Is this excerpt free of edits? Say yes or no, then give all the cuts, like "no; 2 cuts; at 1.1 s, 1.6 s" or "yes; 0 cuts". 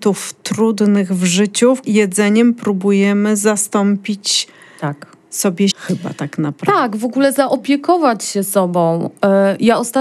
no; 2 cuts; at 1.8 s, 5.7 s